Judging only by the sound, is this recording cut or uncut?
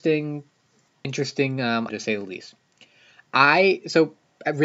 cut